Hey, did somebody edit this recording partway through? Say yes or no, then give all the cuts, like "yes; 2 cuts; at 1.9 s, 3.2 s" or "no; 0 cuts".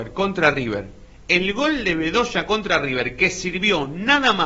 no; 0 cuts